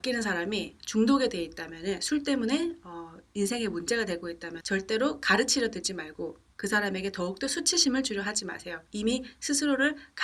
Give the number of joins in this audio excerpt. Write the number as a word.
two